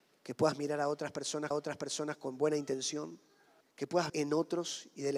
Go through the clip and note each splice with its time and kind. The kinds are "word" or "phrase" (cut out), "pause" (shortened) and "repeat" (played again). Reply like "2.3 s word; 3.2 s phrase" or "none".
1.5 s repeat; 3.6 s pause; 4.1 s word